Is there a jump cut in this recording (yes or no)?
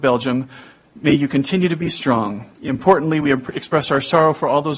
no